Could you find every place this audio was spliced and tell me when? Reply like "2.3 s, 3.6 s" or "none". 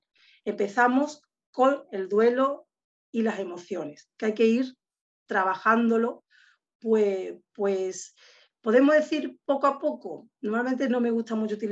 none